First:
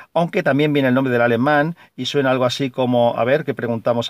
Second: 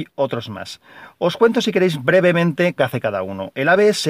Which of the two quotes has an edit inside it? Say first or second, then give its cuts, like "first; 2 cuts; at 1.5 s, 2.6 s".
second; 1 cut; at 2.8 s